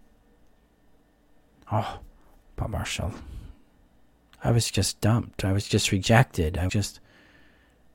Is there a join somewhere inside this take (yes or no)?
yes